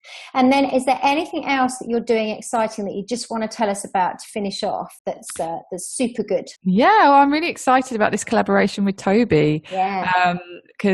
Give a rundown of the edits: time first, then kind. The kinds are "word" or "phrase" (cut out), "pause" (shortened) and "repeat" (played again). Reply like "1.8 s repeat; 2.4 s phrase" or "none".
5.0 s pause; 6.6 s pause